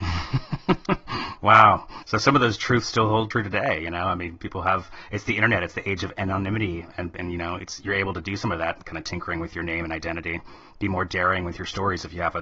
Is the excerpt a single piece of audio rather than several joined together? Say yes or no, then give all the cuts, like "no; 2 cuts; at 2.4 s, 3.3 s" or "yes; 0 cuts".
no; 1 cut; at 2.0 s